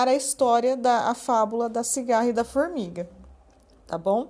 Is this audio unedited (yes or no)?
yes